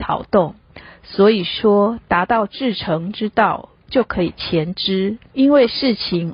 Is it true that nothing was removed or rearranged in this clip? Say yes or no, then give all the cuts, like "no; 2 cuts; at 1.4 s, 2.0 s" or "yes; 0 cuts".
no; 1 cut; at 5.3 s